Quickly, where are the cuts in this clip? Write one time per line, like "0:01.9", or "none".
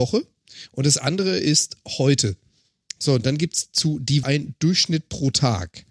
0:04.2